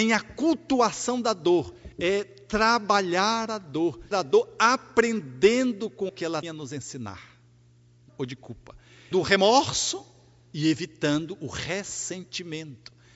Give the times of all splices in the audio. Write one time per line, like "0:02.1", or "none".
0:01.9
0:04.1
0:06.1
0:06.4
0:08.1
0:09.1